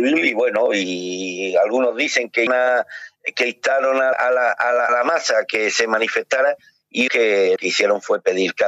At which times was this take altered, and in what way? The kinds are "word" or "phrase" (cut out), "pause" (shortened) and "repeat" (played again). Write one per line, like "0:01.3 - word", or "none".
0:02.5 - word
0:04.1 - word
0:04.9 - word
0:07.1 - word
0:07.6 - word